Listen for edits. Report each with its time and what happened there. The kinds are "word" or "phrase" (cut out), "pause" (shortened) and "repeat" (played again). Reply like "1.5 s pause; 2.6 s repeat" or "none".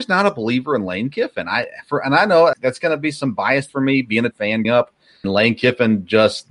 2.5 s word; 3.7 s word; 4.3 s word; 4.6 s word; 5.2 s word